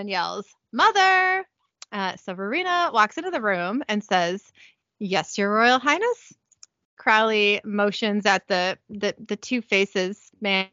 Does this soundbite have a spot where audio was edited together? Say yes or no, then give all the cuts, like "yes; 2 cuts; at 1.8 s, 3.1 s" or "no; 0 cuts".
no; 0 cuts